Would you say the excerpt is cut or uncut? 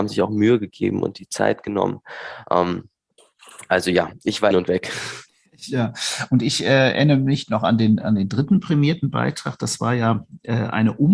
cut